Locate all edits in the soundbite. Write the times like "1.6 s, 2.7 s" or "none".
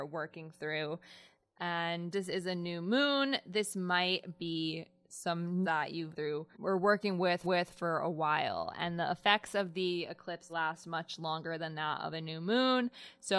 2.1 s, 5.6 s, 6.1 s, 6.5 s, 7.4 s, 10.5 s